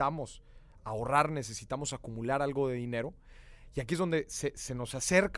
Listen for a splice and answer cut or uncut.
uncut